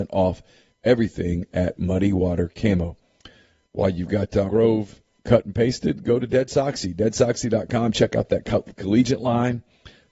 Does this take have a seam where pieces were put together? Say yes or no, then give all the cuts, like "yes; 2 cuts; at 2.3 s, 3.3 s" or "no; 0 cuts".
yes; 1 cut; at 4.5 s